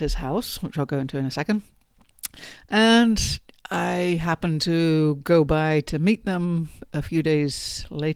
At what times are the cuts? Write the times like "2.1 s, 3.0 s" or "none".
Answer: none